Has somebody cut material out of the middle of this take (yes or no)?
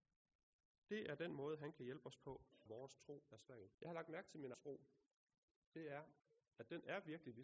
yes